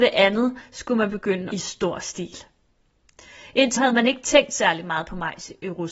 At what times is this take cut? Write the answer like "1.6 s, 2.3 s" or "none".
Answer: 1.5 s, 3.8 s